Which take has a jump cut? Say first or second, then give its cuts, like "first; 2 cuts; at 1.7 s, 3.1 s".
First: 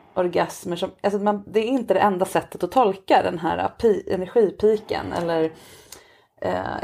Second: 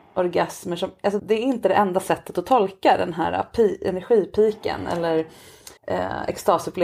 second; 2 cuts; at 1.2 s, 5.8 s